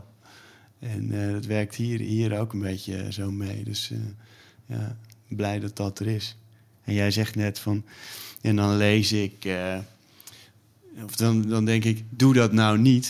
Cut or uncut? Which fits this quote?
uncut